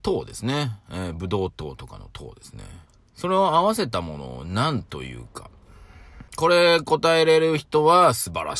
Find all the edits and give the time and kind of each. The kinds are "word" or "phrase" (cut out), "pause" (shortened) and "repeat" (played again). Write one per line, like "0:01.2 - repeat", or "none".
0:02.9 - pause
0:06.3 - pause